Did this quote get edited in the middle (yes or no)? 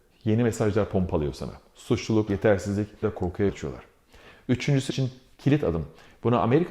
yes